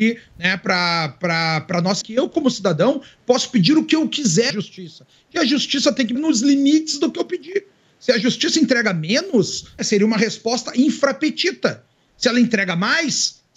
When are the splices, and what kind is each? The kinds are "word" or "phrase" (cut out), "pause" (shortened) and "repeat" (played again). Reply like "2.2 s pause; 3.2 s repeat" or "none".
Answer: 2.0 s word; 4.5 s word; 6.1 s word; 9.8 s word